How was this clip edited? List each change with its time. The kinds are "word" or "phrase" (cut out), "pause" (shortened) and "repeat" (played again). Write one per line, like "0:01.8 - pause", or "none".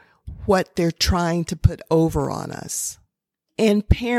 none